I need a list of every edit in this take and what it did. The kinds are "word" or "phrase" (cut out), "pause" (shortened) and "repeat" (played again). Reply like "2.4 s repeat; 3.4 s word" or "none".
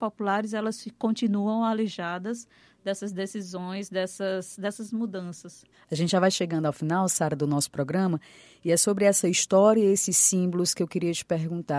none